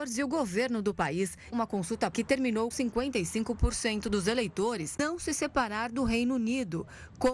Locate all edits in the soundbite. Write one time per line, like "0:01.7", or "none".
0:01.5
0:02.1
0:02.7
0:05.0